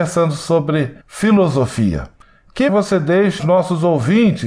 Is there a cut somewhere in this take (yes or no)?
yes